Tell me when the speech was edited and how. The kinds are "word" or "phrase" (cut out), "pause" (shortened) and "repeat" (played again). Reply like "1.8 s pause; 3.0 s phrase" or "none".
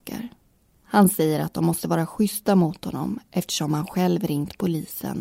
none